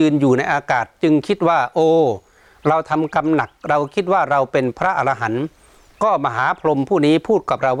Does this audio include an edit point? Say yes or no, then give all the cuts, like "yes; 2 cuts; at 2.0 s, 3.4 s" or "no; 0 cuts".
no; 0 cuts